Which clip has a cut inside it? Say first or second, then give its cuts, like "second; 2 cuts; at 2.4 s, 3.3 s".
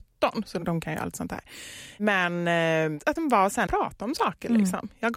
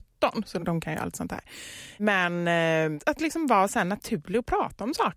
first; 2 cuts; at 3.2 s, 3.7 s